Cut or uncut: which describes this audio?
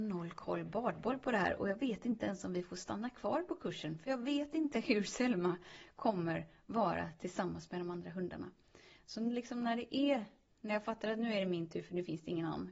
uncut